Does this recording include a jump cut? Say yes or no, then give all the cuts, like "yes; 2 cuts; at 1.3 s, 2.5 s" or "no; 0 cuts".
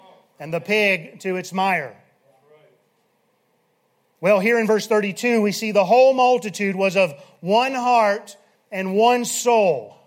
no; 0 cuts